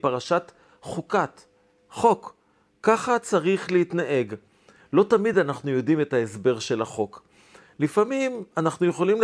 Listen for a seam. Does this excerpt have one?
no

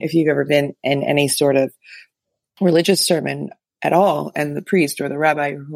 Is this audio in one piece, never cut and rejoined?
yes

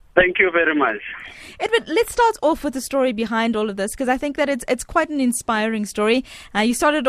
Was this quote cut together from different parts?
no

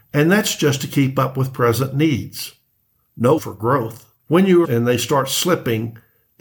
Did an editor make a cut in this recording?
yes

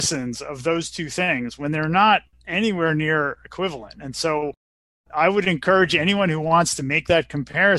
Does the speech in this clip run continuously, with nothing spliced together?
yes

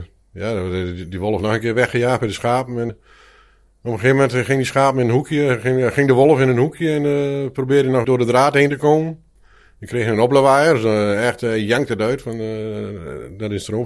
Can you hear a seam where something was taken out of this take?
yes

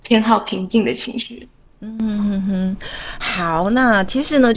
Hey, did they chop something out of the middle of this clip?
no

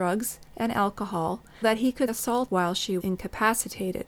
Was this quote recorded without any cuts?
no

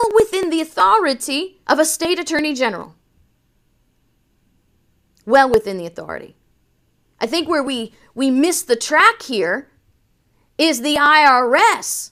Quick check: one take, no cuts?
no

